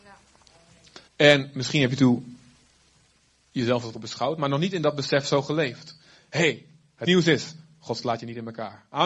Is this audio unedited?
no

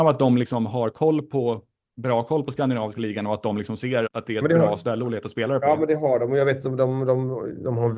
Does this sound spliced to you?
yes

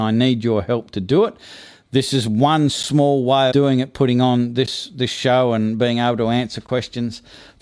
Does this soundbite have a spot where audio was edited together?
yes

